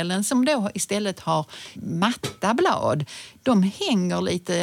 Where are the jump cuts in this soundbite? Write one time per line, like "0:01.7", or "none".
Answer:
0:01.7

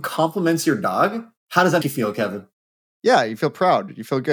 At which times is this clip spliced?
0:01.4
0:01.8

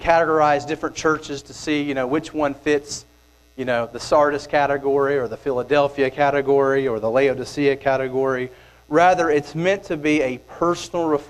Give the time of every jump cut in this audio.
none

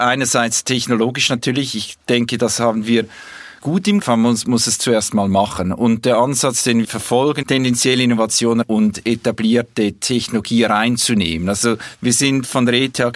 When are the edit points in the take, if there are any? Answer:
0:03.6
0:04.0
0:06.8
0:07.4
0:08.6

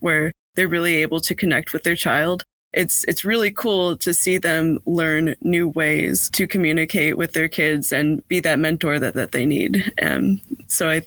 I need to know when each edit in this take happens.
0:02.5
0:09.1

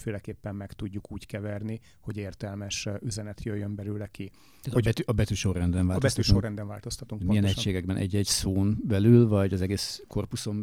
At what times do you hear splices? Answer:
none

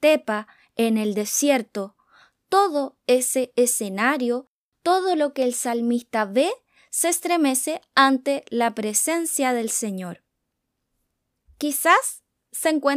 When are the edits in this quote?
none

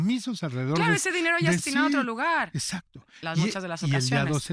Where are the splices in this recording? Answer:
0:01.6

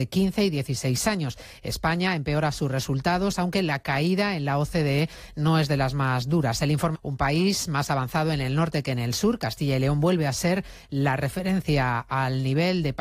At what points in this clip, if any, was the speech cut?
0:06.9

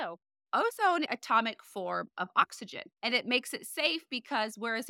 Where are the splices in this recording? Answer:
0:01.1
0:02.9

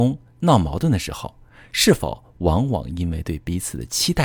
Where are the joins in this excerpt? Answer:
none

